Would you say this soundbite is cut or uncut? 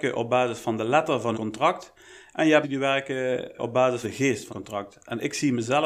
cut